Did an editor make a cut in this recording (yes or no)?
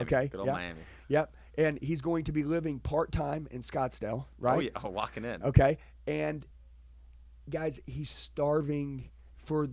no